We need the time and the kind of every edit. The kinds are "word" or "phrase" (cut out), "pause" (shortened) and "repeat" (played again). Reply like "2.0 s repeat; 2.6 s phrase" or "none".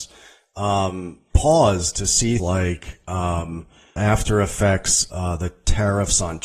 2.4 s word; 4.0 s word; 5.1 s word

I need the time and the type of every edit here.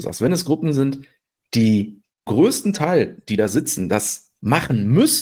2.3 s word

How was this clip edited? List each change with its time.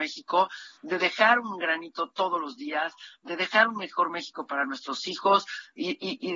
none

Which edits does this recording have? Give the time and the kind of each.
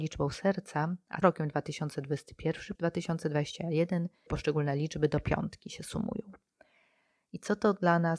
1.2 s word; 2.7 s word; 4.3 s phrase

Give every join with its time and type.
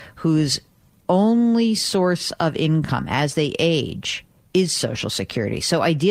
none

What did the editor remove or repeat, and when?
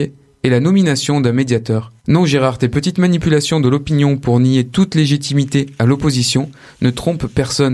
2.0 s pause

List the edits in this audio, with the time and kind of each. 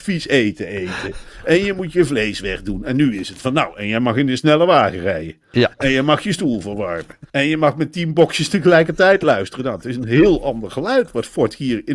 7.3 s pause

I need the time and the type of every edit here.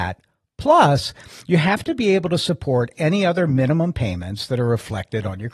none

